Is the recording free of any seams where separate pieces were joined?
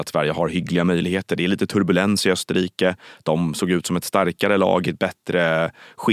yes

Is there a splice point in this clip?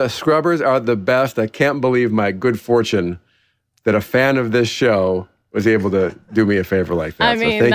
no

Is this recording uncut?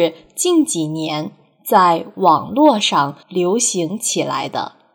no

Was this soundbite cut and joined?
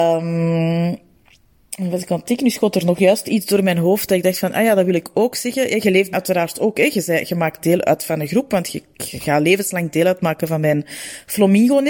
yes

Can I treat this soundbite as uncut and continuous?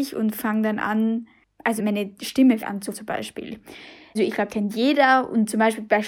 no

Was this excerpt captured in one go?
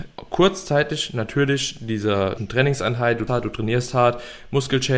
no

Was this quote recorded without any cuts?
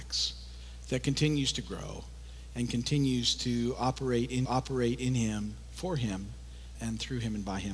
no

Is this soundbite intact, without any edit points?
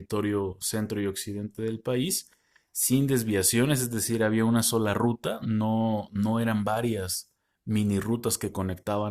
yes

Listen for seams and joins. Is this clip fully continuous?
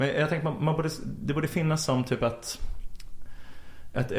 yes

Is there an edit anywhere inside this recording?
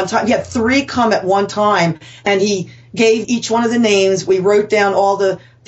yes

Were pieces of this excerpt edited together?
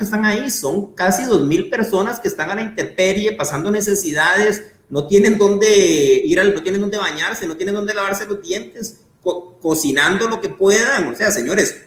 yes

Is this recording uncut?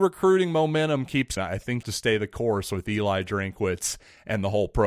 no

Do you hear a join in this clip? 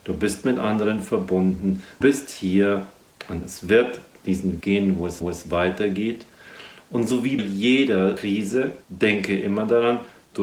yes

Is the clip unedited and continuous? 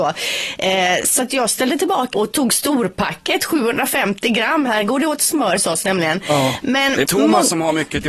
no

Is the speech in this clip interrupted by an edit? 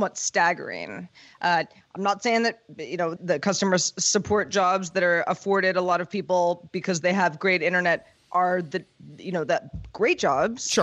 yes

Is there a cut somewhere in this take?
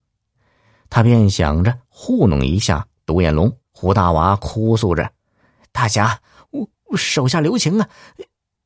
yes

